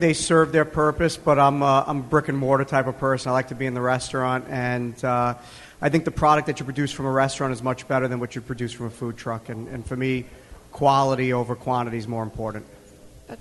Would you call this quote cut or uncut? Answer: uncut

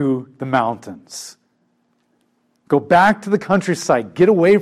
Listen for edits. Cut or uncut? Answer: uncut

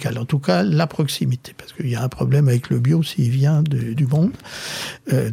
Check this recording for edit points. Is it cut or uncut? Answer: cut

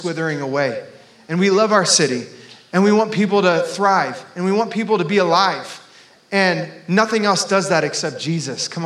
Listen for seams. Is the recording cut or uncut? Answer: uncut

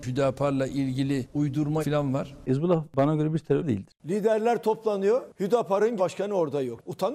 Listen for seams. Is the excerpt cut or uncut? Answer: cut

